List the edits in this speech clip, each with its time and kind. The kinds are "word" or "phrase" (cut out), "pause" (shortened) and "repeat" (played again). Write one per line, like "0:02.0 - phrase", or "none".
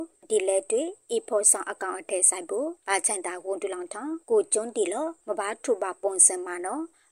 0:02.8 - pause
0:04.2 - pause
0:05.2 - pause